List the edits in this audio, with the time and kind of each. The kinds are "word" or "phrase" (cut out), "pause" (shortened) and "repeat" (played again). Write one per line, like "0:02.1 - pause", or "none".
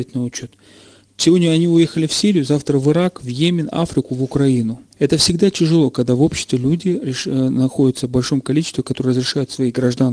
0:04.9 - pause